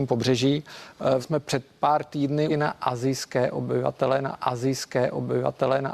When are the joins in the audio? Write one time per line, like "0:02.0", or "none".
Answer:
0:01.2
0:02.5
0:04.3